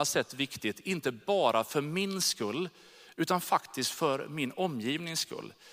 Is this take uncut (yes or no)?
yes